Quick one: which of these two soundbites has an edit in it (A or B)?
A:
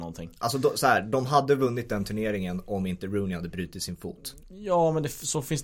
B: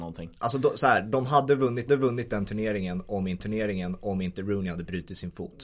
B